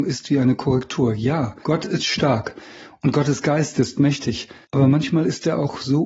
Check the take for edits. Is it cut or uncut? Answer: cut